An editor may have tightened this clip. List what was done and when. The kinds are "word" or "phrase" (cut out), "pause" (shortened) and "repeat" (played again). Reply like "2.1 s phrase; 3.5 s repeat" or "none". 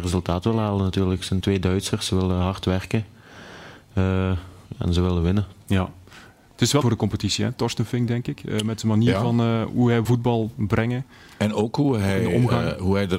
1.4 s phrase; 6.8 s phrase; 10.0 s word